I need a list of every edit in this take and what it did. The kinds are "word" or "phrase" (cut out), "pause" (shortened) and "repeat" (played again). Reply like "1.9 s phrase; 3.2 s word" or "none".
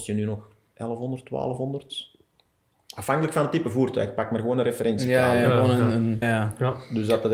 6.2 s word